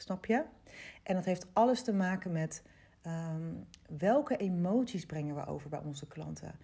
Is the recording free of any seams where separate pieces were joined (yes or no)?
yes